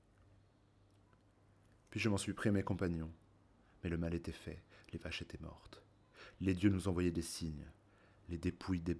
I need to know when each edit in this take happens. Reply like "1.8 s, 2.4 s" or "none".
none